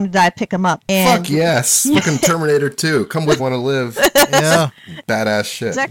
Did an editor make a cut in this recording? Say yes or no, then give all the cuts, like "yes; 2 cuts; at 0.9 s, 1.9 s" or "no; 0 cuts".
yes; 1 cut; at 3.4 s